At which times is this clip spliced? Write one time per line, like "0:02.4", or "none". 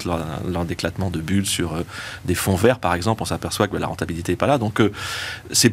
none